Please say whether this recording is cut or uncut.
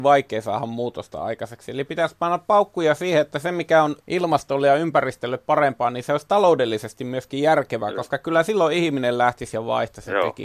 cut